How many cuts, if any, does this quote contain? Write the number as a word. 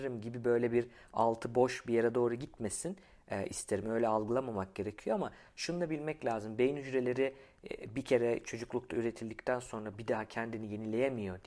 zero